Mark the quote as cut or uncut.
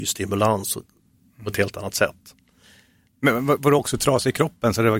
uncut